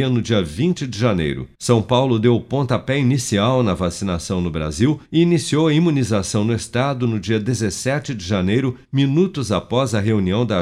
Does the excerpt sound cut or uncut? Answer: cut